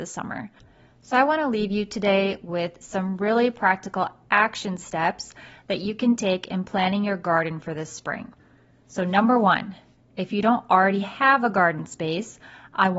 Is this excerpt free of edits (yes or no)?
yes